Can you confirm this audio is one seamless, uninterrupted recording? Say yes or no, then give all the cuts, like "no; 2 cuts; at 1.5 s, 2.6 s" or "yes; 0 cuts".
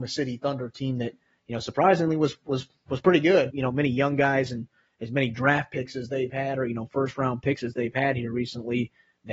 no; 1 cut; at 3.5 s